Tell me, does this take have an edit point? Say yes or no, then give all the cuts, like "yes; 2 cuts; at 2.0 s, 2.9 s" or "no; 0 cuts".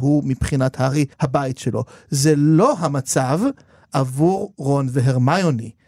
yes; 1 cut; at 1.1 s